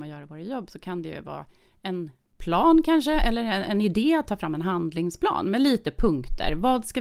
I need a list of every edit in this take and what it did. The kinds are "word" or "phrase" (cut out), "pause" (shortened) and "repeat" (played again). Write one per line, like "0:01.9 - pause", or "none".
none

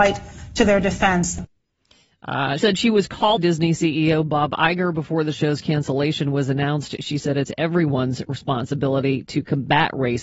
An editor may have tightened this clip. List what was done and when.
0:02.6 - word
0:03.4 - word

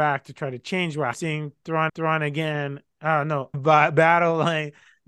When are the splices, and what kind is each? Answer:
0:01.1 - phrase
0:01.9 - repeat
0:03.5 - word

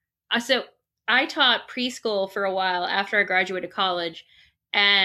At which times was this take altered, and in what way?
none

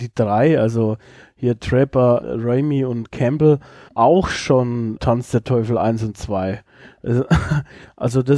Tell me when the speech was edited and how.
0:02.2 - word
0:03.9 - word
0:05.0 - word

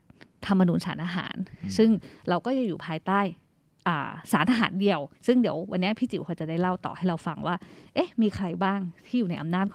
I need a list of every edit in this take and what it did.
0:05.2 - pause

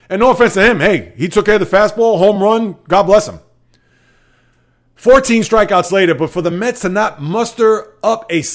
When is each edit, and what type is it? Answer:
none

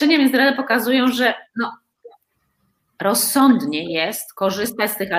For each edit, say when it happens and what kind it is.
none

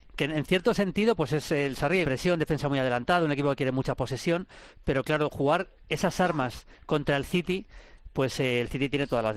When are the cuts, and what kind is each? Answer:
0:02.0 - phrase

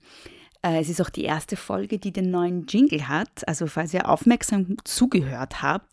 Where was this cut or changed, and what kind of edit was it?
none

